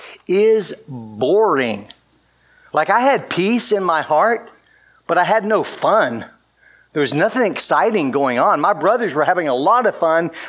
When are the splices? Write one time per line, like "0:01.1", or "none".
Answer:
none